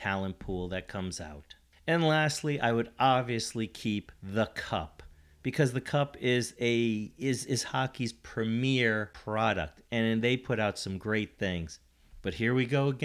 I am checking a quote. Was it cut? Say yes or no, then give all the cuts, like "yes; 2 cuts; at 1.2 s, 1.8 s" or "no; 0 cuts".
no; 0 cuts